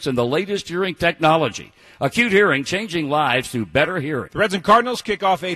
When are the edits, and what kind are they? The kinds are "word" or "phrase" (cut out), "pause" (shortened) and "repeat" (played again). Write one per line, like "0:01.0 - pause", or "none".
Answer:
none